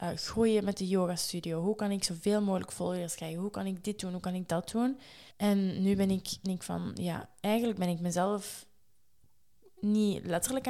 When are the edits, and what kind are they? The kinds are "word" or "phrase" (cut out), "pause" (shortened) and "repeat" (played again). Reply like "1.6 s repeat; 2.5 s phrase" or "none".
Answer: 5.3 s pause; 6.4 s phrase